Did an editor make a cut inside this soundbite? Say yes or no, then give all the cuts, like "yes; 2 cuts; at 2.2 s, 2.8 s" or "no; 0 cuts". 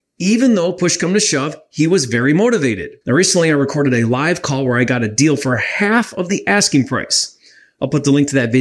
yes; 1 cut; at 3.0 s